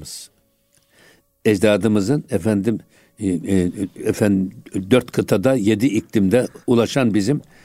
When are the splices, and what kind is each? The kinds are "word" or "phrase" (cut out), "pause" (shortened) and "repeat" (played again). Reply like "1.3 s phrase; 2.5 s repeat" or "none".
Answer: 6.6 s pause